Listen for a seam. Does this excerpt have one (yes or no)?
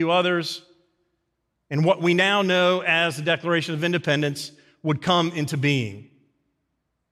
no